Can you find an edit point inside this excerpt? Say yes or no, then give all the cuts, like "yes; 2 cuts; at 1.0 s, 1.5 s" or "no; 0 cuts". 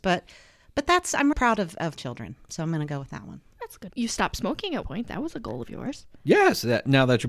yes; 4 cuts; at 1.3 s, 1.9 s, 3.9 s, 4.8 s